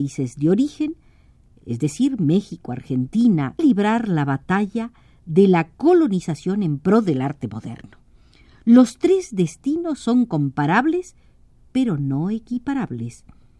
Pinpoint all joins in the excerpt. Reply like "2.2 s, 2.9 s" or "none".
3.6 s